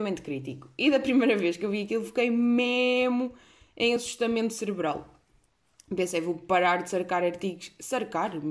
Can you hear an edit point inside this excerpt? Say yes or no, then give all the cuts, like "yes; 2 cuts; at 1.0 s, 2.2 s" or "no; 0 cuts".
no; 0 cuts